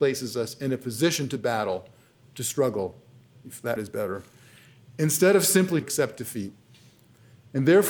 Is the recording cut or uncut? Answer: cut